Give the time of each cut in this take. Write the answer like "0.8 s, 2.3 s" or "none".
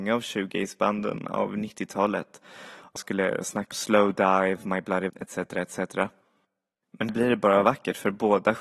3.0 s, 3.7 s, 5.1 s, 7.1 s